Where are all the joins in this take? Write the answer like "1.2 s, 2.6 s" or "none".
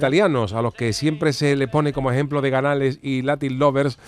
none